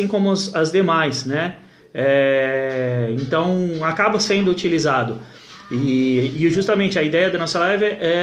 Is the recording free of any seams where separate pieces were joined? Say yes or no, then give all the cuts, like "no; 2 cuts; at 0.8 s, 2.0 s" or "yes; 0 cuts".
yes; 0 cuts